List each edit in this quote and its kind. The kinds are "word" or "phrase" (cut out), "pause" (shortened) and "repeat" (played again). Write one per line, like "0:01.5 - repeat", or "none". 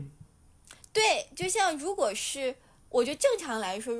none